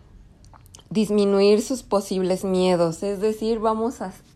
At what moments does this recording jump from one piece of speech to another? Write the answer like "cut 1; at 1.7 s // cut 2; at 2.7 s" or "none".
none